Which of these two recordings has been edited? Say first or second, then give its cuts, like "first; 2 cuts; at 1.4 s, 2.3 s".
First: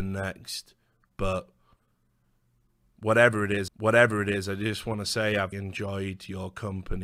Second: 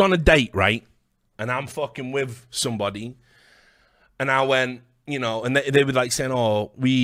first; 2 cuts; at 3.7 s, 5.5 s